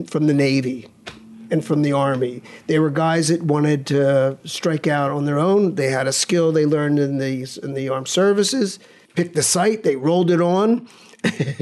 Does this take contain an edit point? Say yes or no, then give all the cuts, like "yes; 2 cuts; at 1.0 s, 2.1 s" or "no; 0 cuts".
no; 0 cuts